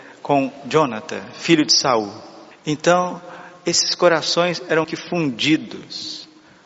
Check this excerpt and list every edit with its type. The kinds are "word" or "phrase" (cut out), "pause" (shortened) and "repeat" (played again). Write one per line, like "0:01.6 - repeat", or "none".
0:02.5 - pause
0:04.8 - word